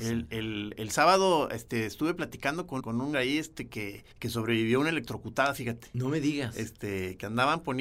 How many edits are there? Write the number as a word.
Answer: three